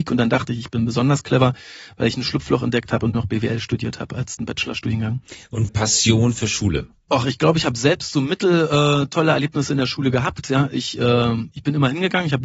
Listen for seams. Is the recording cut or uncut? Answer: cut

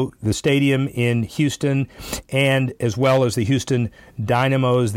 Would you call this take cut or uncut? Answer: uncut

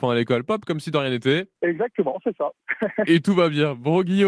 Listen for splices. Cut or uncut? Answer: cut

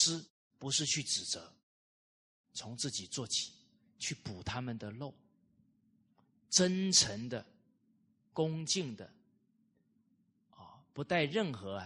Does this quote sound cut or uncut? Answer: uncut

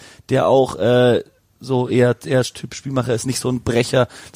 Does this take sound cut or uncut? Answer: uncut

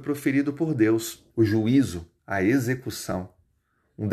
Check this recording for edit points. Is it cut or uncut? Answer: cut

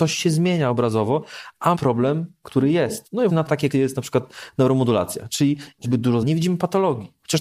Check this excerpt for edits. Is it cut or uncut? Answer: cut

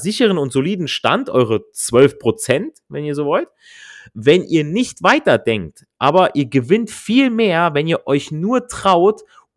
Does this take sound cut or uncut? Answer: uncut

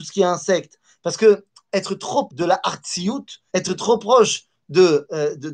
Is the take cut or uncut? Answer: cut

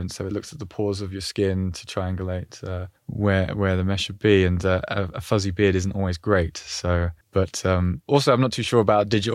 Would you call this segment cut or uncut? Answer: cut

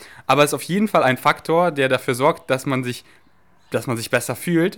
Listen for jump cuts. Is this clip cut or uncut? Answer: uncut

